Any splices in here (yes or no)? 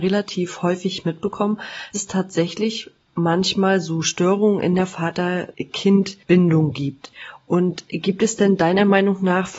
yes